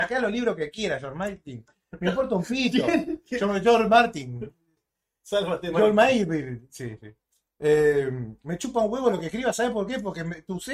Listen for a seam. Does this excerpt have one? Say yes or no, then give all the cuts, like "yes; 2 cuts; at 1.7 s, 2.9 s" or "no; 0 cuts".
no; 0 cuts